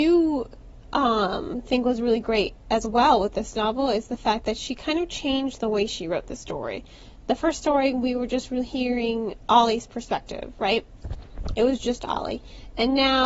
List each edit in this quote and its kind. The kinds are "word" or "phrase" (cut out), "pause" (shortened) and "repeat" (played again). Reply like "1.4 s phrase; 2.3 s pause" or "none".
none

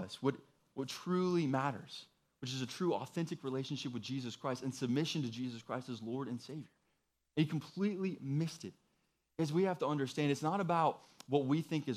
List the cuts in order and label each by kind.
none

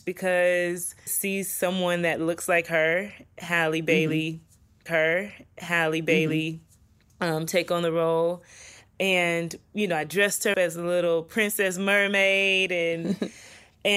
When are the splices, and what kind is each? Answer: 1.1 s phrase; 4.9 s repeat; 10.5 s word

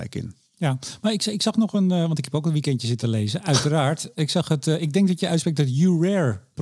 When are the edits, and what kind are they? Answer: none

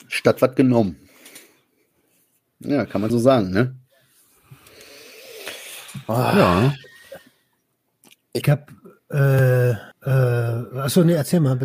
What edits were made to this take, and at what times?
3.1 s word; 8.4 s phrase; 9.9 s pause

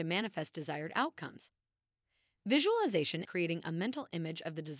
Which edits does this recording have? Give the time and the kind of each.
3.2 s word

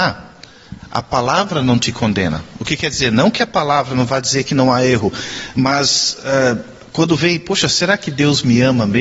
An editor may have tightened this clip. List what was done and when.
none

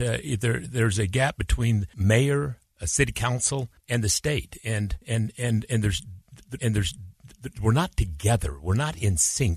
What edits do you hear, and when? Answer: 1.9 s word; 3.8 s pause; 5.0 s pause; 6.6 s repeat

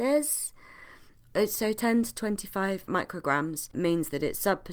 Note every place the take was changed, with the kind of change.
3.7 s word

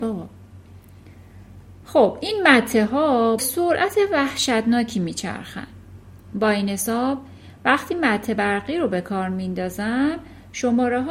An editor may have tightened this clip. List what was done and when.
3.4 s word

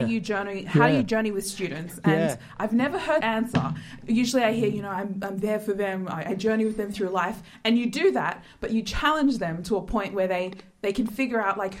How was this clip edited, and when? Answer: 3.2 s word

